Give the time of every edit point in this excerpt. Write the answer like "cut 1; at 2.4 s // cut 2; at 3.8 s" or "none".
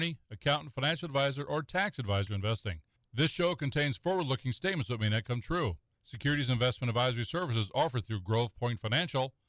cut 1; at 2.3 s